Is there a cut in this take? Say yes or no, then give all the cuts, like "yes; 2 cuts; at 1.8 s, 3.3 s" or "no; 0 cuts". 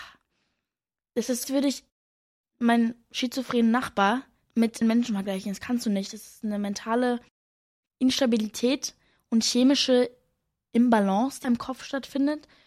yes; 3 cuts; at 1.4 s, 4.8 s, 11.4 s